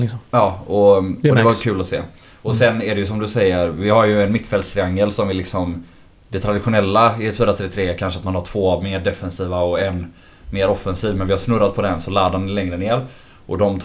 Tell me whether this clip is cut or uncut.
uncut